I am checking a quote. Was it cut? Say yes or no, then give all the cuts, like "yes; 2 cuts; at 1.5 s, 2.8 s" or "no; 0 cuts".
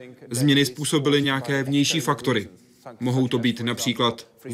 no; 0 cuts